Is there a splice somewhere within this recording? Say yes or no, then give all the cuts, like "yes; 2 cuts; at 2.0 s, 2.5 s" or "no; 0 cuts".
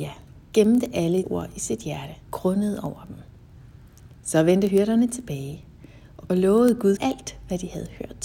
yes; 4 cuts; at 1.2 s, 2.2 s, 6.3 s, 7.0 s